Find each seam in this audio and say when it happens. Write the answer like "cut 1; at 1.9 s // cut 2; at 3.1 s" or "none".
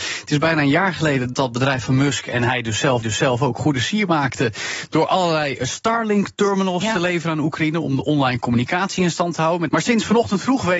cut 1; at 1.3 s // cut 2; at 3.0 s // cut 3; at 9.7 s